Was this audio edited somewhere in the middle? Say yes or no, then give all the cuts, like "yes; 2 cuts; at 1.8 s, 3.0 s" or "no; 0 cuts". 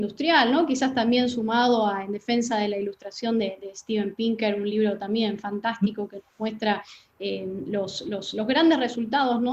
no; 0 cuts